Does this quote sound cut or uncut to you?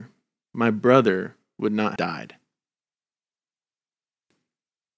cut